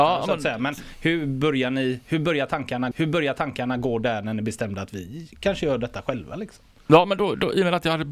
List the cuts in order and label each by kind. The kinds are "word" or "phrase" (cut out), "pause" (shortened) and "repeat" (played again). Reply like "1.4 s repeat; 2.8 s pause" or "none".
2.9 s repeat